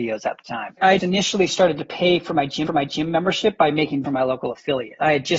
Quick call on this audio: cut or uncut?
cut